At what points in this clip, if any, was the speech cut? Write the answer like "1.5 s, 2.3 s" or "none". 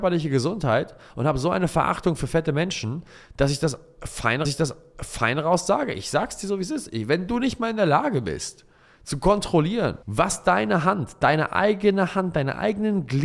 4.4 s, 10.0 s